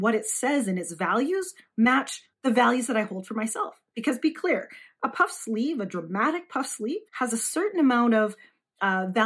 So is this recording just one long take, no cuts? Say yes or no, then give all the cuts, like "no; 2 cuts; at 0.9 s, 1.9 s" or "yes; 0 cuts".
no; 2 cuts; at 2.3 s, 7.1 s